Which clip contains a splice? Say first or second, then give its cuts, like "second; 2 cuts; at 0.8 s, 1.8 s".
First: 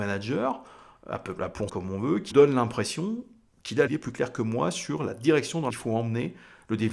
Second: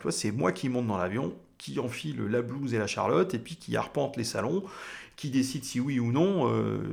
first; 4 cuts; at 1.7 s, 2.3 s, 3.9 s, 5.7 s